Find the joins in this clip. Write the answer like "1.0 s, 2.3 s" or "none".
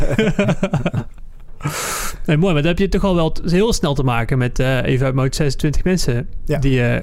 none